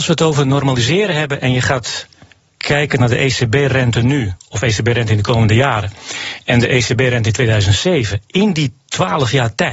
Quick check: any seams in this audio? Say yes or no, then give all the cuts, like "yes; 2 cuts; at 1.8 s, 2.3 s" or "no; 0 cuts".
no; 0 cuts